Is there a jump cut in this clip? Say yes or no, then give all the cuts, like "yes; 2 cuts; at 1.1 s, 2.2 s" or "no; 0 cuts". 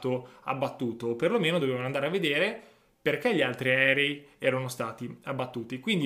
no; 0 cuts